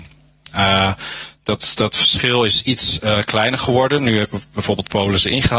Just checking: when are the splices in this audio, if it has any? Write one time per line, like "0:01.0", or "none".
none